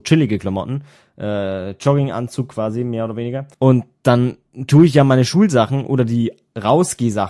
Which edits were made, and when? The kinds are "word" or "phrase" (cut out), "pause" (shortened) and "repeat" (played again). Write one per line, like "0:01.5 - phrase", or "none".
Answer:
0:03.5 - pause